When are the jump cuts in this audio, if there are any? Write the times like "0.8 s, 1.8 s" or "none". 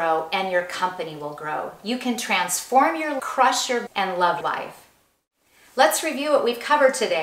3.2 s, 3.9 s, 4.4 s